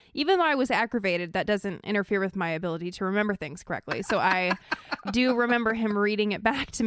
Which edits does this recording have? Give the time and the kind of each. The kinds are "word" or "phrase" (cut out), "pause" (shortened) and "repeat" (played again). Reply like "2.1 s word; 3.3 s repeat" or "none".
5.1 s word